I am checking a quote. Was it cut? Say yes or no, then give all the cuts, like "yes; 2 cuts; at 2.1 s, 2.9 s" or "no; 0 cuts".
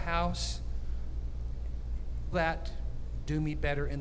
yes; 1 cut; at 2.3 s